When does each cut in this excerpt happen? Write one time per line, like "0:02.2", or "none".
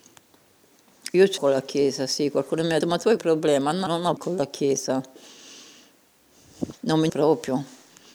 0:01.4
0:02.8
0:03.2
0:03.9
0:04.2
0:07.1